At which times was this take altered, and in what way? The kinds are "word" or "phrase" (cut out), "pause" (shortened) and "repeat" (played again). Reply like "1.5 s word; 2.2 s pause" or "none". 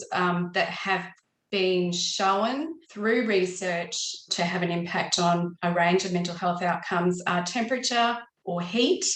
2.8 s pause; 4.3 s word

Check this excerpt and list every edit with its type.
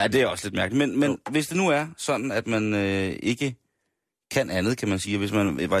none

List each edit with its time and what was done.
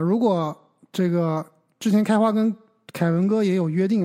none

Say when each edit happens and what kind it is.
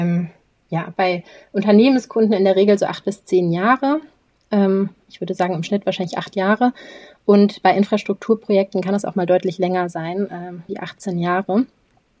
10.7 s word

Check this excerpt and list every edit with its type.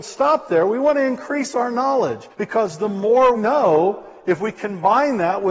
2.3 s pause; 3.3 s word

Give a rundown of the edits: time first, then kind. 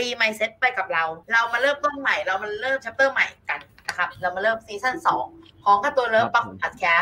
1.2 s pause; 3.4 s pause

